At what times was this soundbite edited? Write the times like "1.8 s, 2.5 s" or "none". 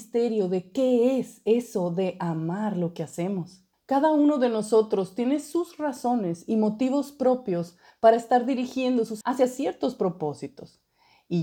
3.7 s, 9.2 s